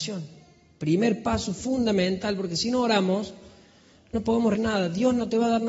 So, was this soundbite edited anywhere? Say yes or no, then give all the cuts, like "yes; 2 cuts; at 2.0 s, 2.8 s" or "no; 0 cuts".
yes; 1 cut; at 4.6 s